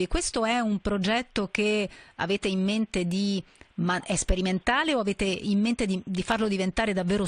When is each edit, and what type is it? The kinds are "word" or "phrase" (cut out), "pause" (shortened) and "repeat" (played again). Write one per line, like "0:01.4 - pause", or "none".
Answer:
none